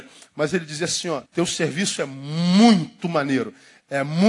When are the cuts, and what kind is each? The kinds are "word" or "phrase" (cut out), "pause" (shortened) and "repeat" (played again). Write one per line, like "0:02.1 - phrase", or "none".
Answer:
0:01.3 - pause